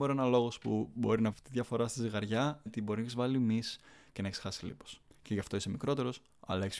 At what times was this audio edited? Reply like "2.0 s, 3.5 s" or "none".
1.3 s, 2.7 s, 5.1 s